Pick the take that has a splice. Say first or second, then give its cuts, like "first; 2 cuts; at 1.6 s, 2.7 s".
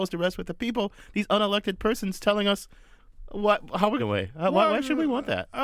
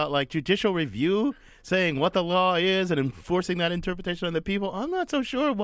first; 1 cut; at 4.0 s